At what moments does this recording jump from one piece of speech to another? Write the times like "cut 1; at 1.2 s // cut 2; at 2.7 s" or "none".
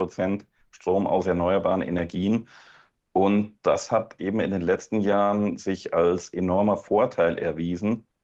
none